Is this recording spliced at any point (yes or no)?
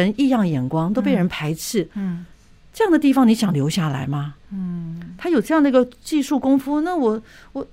no